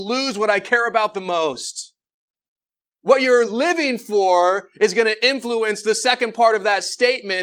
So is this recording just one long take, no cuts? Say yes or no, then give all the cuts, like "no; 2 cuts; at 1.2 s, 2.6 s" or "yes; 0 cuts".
yes; 0 cuts